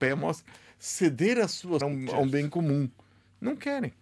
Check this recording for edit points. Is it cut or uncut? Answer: cut